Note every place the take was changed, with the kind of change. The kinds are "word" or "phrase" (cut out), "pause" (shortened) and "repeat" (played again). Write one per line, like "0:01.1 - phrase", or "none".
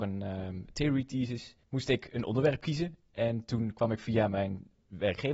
0:01.6 - pause